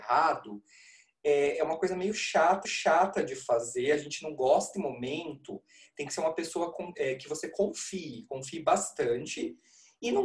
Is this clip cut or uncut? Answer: cut